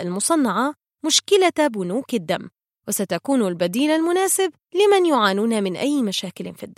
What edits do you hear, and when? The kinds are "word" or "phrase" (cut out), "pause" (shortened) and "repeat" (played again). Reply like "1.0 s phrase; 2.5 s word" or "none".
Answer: 4.6 s pause